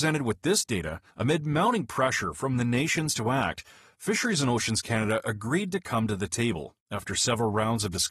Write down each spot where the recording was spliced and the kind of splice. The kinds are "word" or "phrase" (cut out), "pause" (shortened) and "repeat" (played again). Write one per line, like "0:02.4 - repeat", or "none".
0:01.1 - pause
0:06.8 - pause